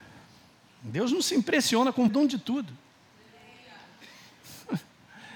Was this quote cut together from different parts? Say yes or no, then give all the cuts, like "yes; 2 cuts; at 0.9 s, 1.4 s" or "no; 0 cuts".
yes; 1 cut; at 2.1 s